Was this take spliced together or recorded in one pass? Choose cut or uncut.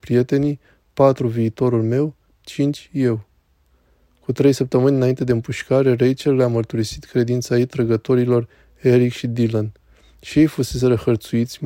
uncut